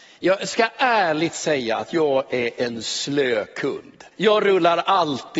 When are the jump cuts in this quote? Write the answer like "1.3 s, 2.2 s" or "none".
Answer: 4.1 s